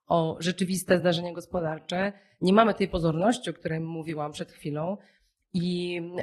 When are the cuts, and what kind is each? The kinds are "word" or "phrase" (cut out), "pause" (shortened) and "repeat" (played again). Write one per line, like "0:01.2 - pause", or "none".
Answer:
none